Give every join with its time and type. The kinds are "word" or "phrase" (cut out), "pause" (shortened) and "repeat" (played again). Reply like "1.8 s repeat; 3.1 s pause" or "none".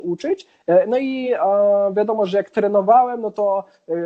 none